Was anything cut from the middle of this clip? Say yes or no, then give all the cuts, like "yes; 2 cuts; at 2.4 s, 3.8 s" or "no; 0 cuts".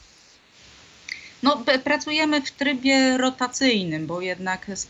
no; 0 cuts